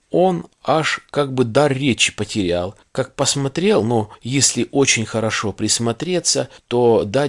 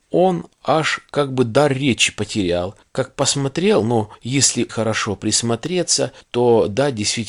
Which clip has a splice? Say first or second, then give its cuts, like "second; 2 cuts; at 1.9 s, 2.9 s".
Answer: second; 1 cut; at 4.7 s